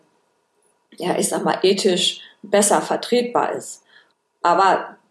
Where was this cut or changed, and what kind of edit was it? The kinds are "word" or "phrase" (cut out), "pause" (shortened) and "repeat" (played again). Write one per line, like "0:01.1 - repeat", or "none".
0:04.1 - pause